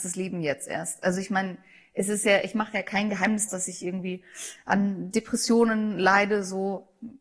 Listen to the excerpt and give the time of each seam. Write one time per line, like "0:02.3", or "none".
0:03.5

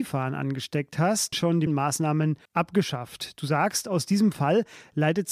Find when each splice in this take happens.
0:01.3
0:01.7
0:02.5

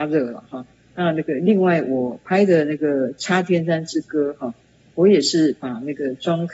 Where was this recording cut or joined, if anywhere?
none

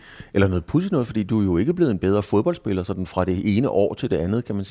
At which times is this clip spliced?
none

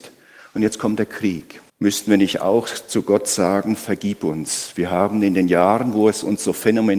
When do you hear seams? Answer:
0:01.7

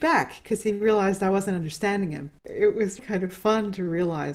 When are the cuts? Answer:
0:02.4
0:03.0

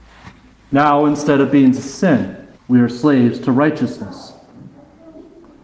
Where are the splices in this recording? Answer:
0:01.7
0:02.6

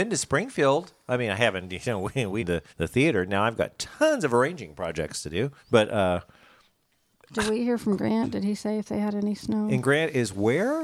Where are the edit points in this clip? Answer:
0:02.4
0:02.7
0:05.6

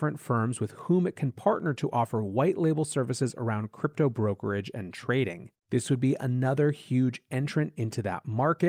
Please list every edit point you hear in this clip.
0:05.6

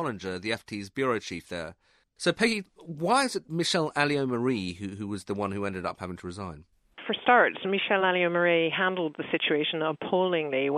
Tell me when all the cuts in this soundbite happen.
none

